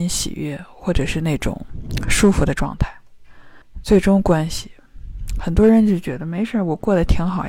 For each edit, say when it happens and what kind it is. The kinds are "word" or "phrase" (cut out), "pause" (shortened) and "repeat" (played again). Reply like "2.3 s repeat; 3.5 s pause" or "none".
3.6 s pause